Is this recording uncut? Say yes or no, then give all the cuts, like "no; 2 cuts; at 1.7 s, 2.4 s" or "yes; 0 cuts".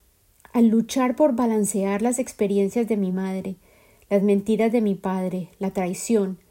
yes; 0 cuts